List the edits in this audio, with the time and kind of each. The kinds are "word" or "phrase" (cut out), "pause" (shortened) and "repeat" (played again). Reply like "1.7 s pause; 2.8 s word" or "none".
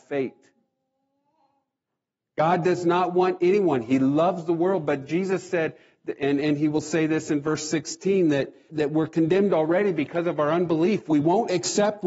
8.7 s word